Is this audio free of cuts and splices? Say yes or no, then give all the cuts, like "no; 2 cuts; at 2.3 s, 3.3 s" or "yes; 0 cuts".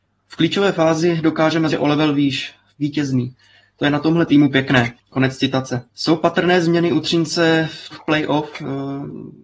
no; 5 cuts; at 1.7 s, 2.7 s, 5.0 s, 5.9 s, 7.9 s